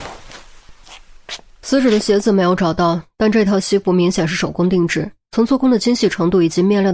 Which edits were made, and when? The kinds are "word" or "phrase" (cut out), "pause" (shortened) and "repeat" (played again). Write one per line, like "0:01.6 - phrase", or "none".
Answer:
none